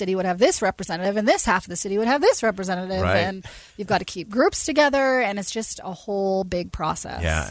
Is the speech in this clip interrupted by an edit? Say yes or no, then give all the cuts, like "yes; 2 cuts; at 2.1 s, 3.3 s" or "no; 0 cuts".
no; 0 cuts